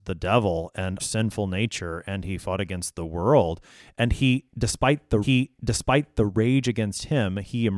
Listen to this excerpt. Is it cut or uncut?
cut